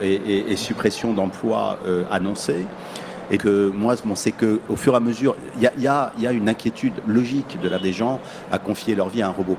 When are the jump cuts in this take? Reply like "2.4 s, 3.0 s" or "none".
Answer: 3.4 s, 4.2 s, 7.8 s